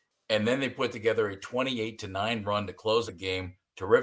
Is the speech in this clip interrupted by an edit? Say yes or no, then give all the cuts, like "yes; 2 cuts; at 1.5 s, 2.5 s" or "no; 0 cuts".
yes; 1 cut; at 3.1 s